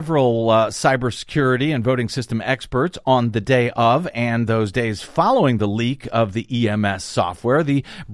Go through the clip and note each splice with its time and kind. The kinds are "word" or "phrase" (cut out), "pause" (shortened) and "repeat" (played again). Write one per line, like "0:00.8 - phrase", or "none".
none